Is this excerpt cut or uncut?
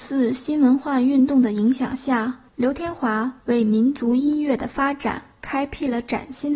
cut